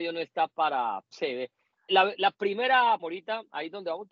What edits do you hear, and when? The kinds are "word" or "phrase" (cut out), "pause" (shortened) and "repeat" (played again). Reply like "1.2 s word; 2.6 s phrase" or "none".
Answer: 1.1 s word; 1.9 s word; 3.0 s word